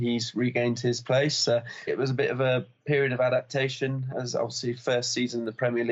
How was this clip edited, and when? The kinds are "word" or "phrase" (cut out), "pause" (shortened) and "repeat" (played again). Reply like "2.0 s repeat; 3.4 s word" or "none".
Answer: 1.9 s word; 4.1 s word